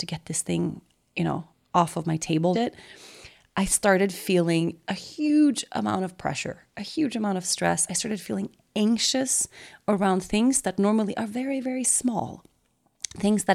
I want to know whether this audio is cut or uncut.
cut